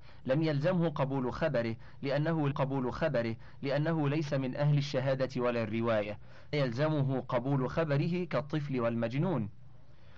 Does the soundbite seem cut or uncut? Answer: cut